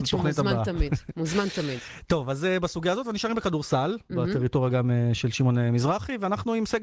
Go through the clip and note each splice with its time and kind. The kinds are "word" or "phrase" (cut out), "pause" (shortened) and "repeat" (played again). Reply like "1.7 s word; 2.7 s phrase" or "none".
none